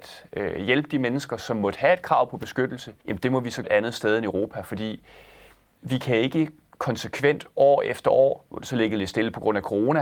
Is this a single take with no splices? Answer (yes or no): no